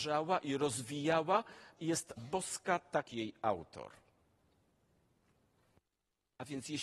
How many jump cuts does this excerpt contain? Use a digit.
3